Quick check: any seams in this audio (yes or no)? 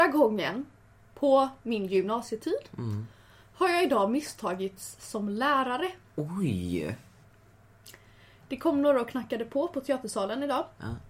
yes